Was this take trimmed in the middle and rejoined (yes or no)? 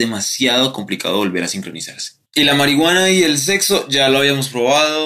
yes